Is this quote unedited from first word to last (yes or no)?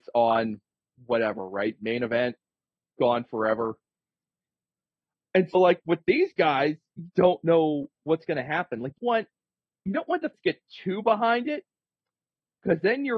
no